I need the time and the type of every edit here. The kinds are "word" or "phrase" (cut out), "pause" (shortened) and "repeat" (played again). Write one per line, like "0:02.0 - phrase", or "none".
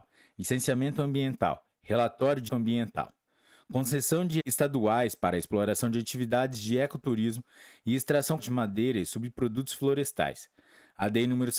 0:02.5 - word
0:04.4 - word
0:08.4 - word